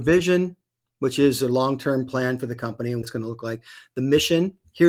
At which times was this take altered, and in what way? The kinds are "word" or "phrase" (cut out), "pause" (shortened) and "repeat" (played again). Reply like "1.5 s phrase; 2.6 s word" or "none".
3.0 s word